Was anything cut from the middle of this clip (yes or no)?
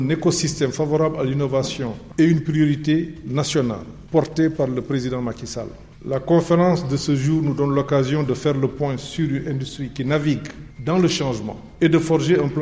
yes